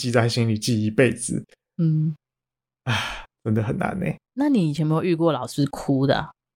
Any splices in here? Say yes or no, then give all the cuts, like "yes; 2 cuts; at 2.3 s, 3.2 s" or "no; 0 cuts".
yes; 1 cut; at 3.3 s